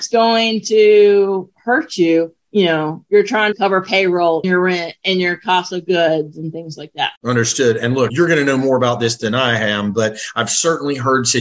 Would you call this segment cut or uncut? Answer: cut